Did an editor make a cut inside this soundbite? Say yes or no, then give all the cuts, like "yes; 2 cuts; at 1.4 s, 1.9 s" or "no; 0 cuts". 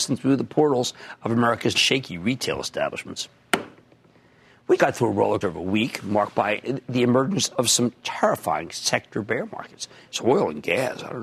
yes; 3 cuts; at 1.7 s, 4.8 s, 5.4 s